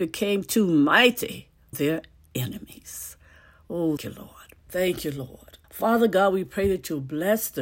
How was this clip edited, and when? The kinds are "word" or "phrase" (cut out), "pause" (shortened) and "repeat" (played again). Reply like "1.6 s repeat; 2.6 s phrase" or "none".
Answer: 1.7 s word; 4.0 s word; 4.6 s pause; 5.6 s pause